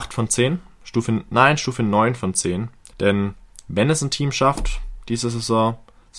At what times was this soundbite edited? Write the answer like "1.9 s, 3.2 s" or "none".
2.9 s